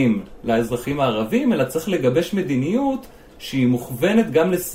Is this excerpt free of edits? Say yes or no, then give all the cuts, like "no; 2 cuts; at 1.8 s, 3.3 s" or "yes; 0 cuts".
yes; 0 cuts